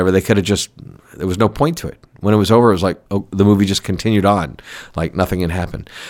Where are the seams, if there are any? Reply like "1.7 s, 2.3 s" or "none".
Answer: 3.1 s